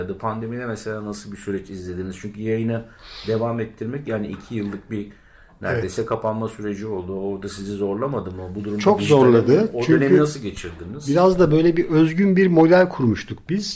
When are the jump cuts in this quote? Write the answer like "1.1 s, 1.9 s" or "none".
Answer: none